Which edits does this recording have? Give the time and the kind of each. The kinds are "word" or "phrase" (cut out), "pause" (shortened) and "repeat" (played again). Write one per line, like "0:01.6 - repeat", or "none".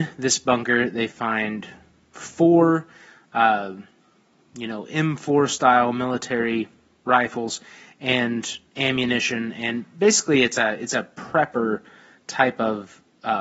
0:08.7 - pause